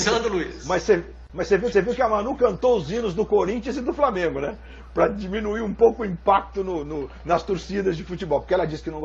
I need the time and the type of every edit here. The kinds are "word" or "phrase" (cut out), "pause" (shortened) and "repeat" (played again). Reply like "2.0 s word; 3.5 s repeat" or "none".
1.7 s repeat